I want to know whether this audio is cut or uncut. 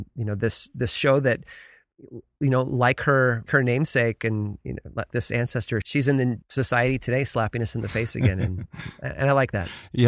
cut